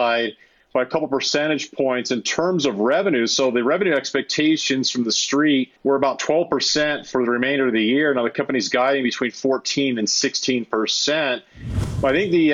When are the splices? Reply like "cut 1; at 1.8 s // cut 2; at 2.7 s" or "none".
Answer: cut 1; at 5.8 s